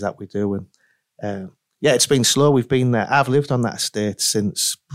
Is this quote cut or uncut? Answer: uncut